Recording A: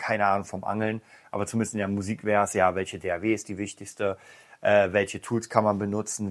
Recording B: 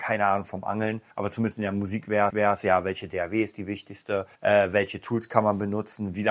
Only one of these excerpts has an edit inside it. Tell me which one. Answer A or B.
B